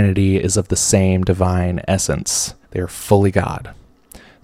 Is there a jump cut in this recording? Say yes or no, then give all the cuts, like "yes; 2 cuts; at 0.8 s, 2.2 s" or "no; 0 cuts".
yes; 1 cut; at 2.6 s